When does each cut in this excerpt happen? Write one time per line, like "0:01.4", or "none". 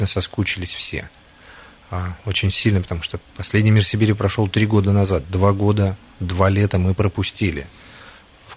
0:03.3